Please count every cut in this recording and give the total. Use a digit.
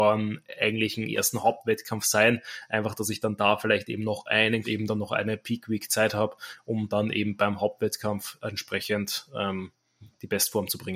1